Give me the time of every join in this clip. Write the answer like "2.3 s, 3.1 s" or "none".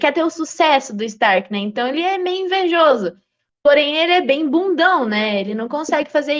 none